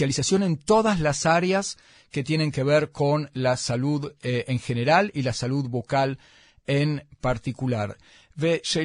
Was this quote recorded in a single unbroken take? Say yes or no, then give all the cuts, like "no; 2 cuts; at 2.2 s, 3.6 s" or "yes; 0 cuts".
yes; 0 cuts